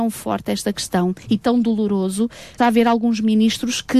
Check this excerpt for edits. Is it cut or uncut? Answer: cut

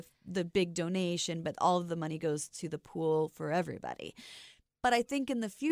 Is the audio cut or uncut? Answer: uncut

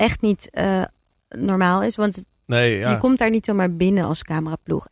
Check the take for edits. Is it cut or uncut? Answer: uncut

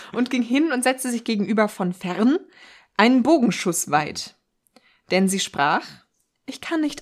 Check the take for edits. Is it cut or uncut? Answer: uncut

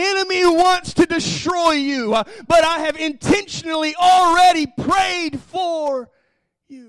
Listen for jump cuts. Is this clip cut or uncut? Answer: uncut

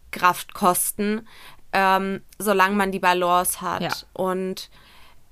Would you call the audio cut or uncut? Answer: uncut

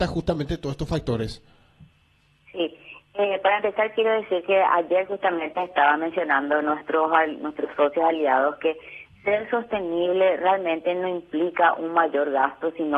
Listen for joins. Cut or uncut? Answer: uncut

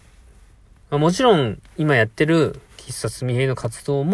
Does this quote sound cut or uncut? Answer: uncut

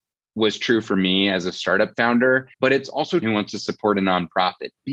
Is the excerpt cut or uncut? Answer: cut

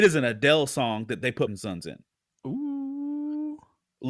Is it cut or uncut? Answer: cut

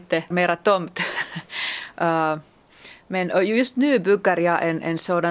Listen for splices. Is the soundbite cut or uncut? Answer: uncut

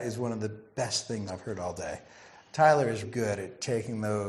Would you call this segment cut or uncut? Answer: cut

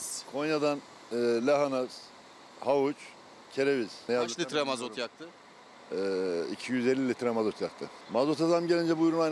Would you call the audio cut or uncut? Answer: uncut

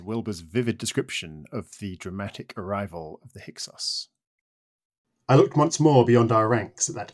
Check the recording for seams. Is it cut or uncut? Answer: uncut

